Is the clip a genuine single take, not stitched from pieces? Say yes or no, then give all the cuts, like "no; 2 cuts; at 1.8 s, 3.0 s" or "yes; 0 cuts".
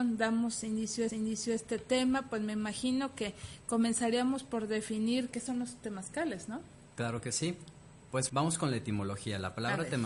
no; 3 cuts; at 1.1 s, 5.3 s, 8.3 s